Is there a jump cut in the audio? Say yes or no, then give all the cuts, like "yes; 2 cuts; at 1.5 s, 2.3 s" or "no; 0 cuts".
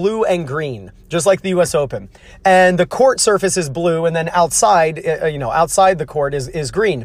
no; 0 cuts